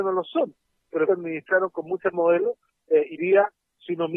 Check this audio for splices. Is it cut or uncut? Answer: cut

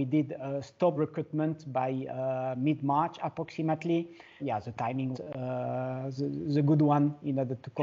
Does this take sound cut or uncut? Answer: cut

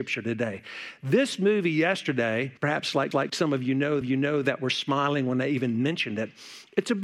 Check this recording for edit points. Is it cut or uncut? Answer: cut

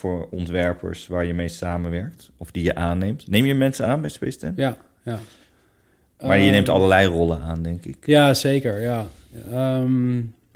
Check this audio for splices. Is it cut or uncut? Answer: uncut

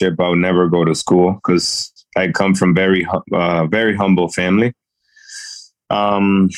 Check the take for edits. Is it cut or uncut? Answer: uncut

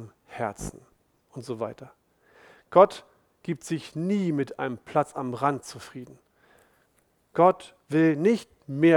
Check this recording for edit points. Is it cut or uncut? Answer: uncut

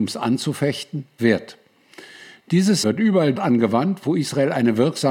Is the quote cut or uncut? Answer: cut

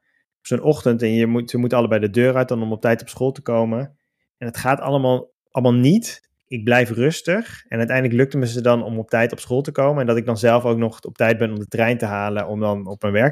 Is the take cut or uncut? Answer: uncut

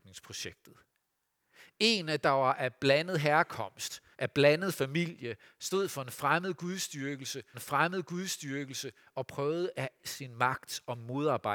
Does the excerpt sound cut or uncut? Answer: cut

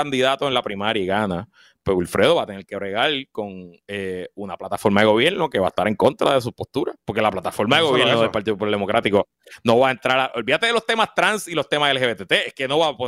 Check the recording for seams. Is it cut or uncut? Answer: cut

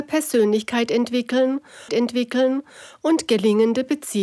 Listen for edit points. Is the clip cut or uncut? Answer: cut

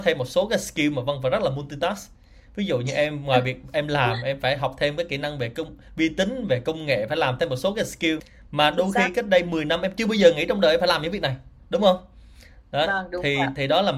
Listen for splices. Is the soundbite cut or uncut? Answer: uncut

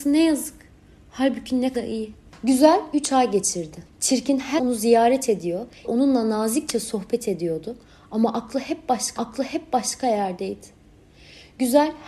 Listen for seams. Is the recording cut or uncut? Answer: cut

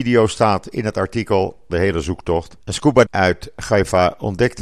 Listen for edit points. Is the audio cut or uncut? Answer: cut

